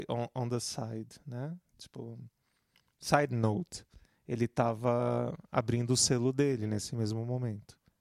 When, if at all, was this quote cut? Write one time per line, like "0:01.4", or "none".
none